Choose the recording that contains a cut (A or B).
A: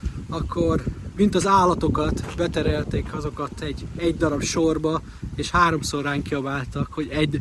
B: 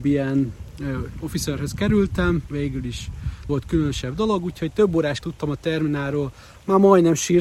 B